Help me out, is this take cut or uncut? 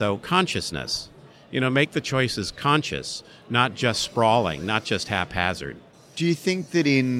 uncut